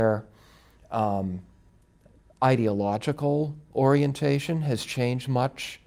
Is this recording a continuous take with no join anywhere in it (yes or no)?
yes